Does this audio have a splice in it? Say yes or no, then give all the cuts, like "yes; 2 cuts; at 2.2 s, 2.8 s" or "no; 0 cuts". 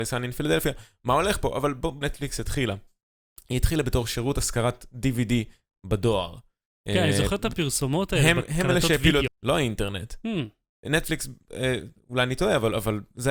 yes; 2 cuts; at 2.0 s, 9.3 s